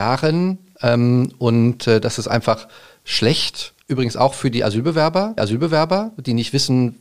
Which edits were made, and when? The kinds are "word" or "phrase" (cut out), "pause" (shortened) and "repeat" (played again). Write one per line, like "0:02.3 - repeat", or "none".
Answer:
0:03.8 - pause
0:05.4 - repeat